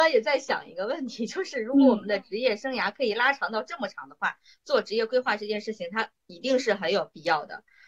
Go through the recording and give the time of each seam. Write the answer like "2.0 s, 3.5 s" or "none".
none